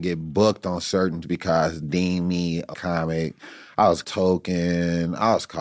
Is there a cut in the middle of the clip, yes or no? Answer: yes